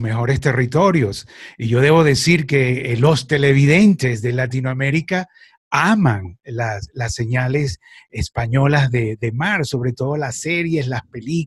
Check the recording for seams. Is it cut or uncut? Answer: uncut